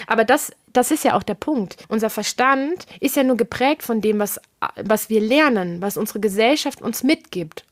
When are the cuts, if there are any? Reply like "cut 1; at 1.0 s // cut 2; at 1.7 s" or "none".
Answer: cut 1; at 1.8 s